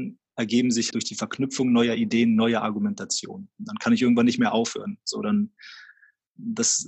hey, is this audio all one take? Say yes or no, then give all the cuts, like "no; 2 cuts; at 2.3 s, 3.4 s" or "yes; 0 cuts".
no; 1 cut; at 0.9 s